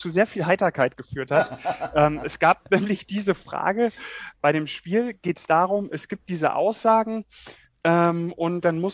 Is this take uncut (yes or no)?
yes